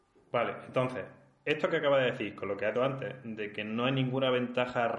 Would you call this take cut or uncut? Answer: cut